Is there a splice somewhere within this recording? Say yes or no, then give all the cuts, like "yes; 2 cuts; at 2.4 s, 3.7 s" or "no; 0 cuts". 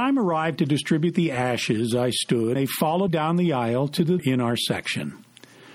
yes; 3 cuts; at 2.6 s, 3.1 s, 4.2 s